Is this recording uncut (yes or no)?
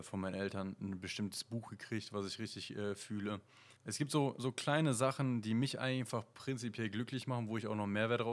no